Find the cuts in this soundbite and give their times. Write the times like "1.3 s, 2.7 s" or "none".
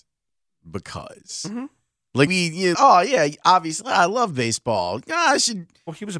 2.3 s, 2.7 s